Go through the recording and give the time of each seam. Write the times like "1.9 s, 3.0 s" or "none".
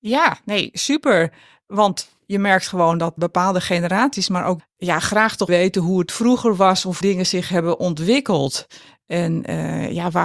3.2 s, 4.6 s, 5.5 s, 7.0 s